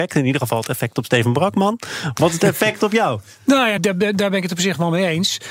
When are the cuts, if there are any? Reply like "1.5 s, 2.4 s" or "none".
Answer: 3.8 s